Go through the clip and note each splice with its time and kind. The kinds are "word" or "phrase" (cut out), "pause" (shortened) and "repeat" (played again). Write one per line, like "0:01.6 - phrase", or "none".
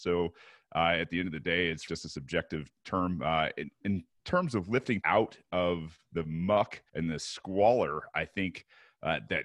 0:01.9 - word
0:03.8 - word
0:05.0 - word
0:06.9 - pause